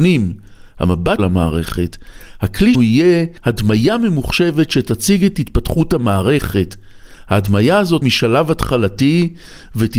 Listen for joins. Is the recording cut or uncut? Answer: cut